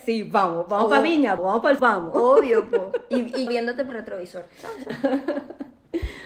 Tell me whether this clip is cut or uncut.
cut